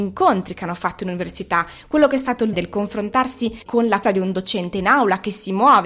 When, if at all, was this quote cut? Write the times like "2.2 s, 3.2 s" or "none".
2.5 s, 3.7 s, 4.0 s